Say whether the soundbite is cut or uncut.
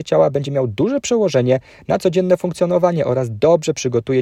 cut